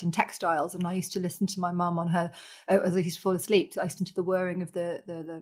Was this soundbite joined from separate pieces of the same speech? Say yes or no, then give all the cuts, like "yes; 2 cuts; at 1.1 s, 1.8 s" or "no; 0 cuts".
yes; 1 cut; at 4.0 s